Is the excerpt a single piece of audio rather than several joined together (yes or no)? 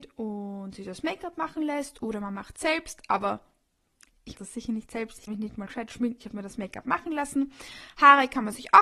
no